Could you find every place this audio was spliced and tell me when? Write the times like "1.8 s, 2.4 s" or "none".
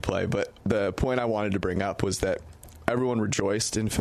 none